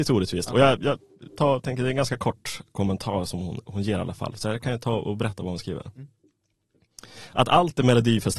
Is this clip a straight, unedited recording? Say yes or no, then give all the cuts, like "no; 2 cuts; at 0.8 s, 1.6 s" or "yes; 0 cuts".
yes; 0 cuts